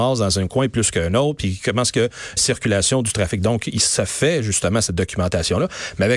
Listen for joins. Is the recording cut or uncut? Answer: cut